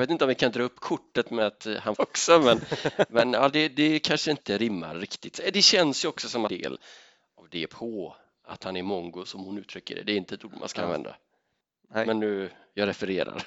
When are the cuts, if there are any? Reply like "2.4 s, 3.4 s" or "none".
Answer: 2.0 s, 6.5 s